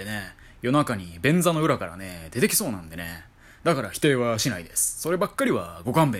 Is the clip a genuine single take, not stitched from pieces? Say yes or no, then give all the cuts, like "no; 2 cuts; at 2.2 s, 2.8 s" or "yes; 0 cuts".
yes; 0 cuts